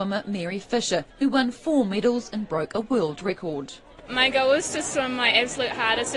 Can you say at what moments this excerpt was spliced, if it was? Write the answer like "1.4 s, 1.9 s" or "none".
1.1 s